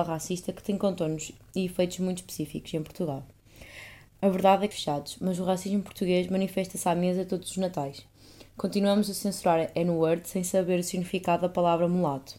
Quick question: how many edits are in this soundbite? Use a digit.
1